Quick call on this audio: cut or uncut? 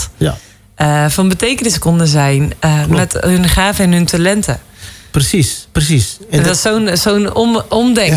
uncut